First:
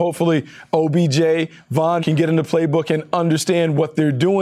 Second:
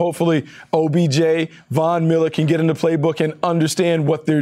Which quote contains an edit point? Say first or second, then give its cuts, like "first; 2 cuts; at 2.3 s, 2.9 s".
first; 1 cut; at 2.0 s